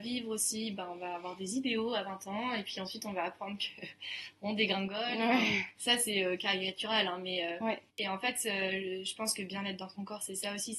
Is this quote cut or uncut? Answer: cut